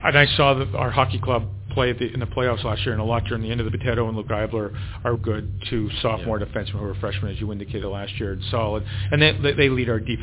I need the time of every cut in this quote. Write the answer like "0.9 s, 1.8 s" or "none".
3.7 s, 5.2 s